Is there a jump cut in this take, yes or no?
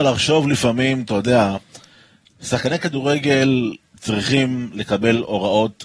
no